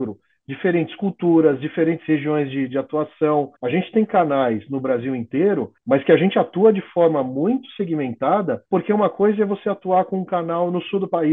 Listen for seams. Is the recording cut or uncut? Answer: cut